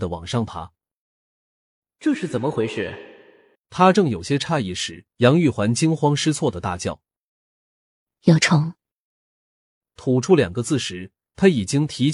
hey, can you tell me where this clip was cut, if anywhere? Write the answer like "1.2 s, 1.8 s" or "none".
3.6 s, 5.1 s